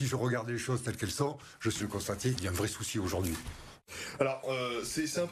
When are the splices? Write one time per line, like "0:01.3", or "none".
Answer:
0:01.8
0:02.4
0:04.4